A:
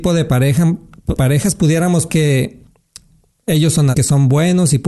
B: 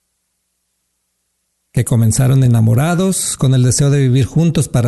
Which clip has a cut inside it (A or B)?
A